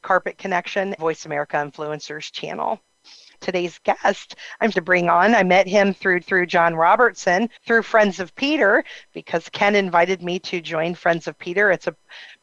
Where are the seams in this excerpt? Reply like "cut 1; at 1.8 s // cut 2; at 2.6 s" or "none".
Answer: cut 1; at 1.0 s // cut 2; at 3.3 s // cut 3; at 4.7 s // cut 4; at 6.2 s // cut 5; at 7.6 s